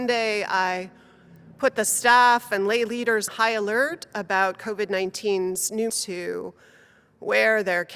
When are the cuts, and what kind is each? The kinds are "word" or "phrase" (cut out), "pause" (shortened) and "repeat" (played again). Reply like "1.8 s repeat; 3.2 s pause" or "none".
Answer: 3.3 s word; 5.9 s phrase